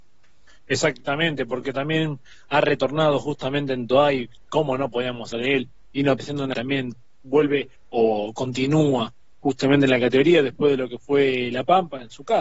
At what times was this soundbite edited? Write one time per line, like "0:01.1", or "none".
0:05.3
0:06.2
0:06.5

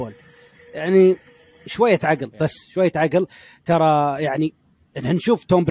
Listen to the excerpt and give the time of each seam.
none

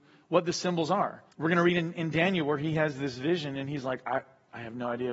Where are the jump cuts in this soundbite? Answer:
0:01.3

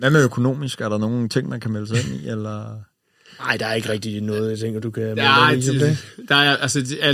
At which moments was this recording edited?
none

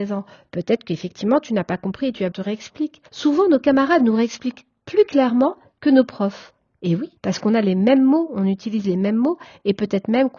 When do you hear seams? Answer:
0:02.3
0:03.1
0:07.2

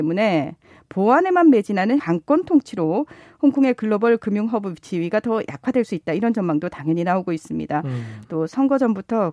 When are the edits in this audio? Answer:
0:02.0

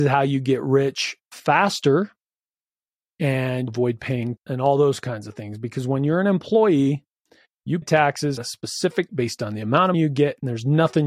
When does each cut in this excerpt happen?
0:03.7
0:04.4
0:07.8
0:08.4
0:09.1
0:09.9

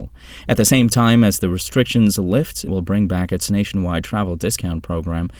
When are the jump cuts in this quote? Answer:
0:02.7

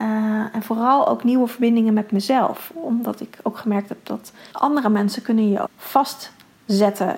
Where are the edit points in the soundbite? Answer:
0:04.5
0:05.7

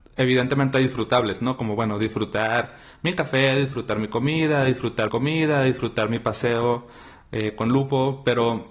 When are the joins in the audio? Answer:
0:05.1

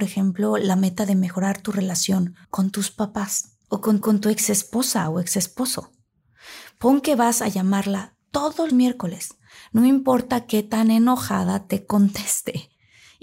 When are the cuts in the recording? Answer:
0:02.4
0:03.6
0:04.0
0:08.7

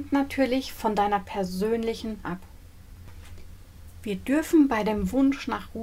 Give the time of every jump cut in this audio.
0:02.2

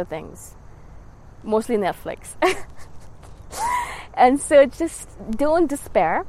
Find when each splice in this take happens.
none

